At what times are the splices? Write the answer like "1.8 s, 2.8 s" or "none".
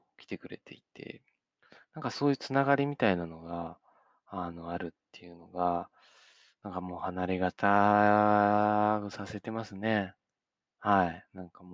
none

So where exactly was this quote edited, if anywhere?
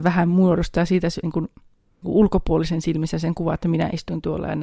1.2 s, 2.0 s

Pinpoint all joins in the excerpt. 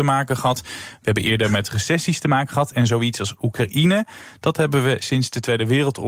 none

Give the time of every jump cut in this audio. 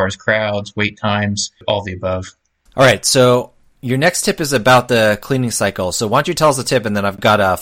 none

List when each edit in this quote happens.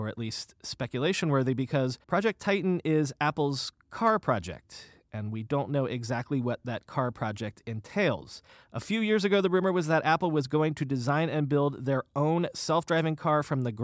2.0 s, 8.5 s

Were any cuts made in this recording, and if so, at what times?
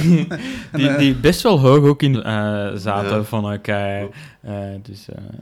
2.1 s

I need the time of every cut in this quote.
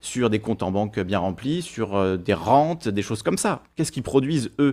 none

